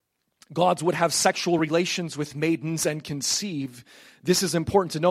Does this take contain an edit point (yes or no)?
no